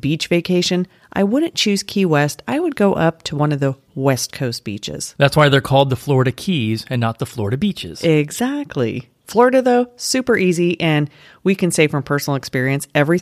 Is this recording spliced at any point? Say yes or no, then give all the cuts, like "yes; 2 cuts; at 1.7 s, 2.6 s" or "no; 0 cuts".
no; 0 cuts